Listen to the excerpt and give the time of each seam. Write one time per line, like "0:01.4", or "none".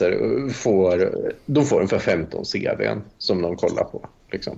none